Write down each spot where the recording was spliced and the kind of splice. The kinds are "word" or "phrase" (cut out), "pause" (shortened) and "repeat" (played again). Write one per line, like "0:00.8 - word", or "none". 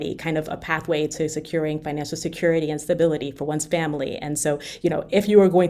none